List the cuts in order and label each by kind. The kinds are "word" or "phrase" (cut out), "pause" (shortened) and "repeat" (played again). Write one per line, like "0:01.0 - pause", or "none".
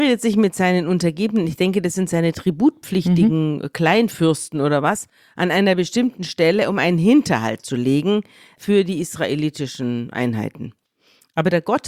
none